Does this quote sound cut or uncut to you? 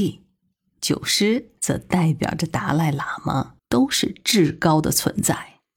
cut